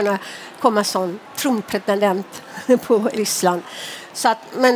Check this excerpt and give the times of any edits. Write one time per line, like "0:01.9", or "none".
0:01.3
0:03.2

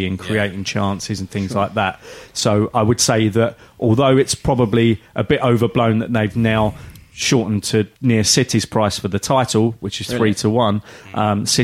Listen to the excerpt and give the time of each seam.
0:07.9

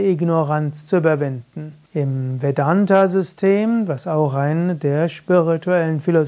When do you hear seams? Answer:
0:01.9

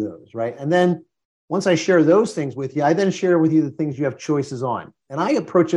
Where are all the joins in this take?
none

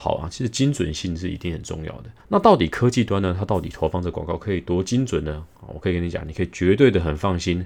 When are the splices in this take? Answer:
0:02.2

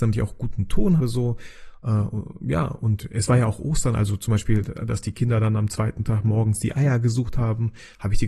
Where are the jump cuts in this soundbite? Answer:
0:01.0

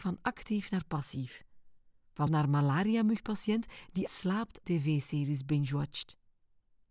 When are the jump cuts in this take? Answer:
0:02.3
0:04.1
0:04.6

